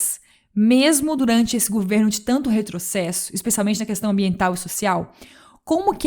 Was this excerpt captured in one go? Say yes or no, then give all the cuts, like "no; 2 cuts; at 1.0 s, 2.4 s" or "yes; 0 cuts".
yes; 0 cuts